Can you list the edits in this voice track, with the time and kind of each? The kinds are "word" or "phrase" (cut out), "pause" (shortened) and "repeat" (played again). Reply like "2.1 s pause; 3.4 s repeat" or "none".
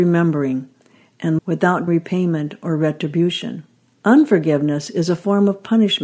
1.4 s phrase; 1.9 s word; 3.9 s pause